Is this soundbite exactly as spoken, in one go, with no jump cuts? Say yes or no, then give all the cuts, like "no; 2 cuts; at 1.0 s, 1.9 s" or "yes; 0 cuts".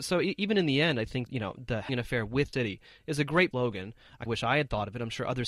no; 5 cuts; at 1.3 s, 1.9 s, 2.5 s, 3.5 s, 4.3 s